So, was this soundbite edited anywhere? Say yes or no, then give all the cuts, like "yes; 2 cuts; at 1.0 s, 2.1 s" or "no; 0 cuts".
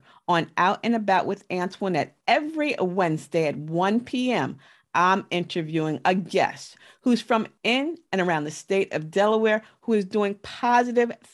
no; 0 cuts